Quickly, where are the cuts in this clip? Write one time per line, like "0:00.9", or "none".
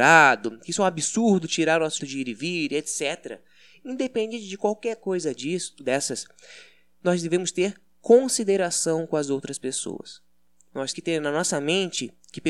0:02.0
0:10.9

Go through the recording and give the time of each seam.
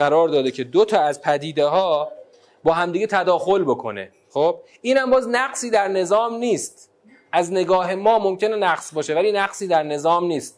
none

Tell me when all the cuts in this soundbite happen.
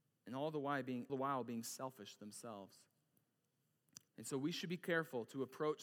0:01.1
0:04.1

